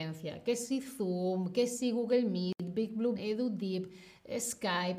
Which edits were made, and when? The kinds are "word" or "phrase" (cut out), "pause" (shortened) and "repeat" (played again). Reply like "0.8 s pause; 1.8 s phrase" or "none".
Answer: 3.1 s word